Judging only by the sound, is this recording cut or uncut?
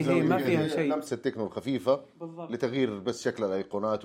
uncut